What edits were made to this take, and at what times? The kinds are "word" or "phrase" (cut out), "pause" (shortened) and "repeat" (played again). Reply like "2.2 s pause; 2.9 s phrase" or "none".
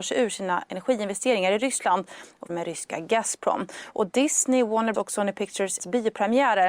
2.5 s word; 4.9 s word; 5.8 s word